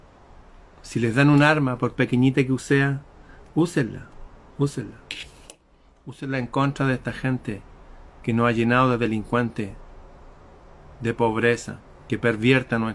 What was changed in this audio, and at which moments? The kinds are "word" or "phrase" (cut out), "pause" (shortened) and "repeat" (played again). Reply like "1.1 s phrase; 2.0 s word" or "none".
none